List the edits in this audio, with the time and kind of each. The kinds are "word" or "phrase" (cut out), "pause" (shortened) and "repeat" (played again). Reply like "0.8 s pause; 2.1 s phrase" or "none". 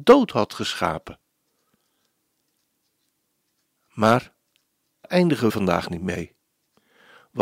5.0 s word; 5.5 s word